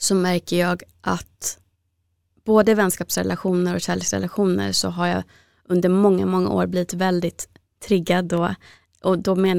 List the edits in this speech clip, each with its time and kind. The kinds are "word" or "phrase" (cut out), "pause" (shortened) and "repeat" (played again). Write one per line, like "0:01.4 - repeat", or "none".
none